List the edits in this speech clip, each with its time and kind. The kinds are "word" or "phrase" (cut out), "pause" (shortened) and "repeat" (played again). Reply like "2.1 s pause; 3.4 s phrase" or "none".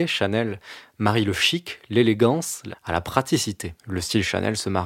2.7 s word; 3.8 s pause